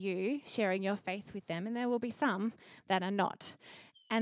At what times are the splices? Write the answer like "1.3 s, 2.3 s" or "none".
none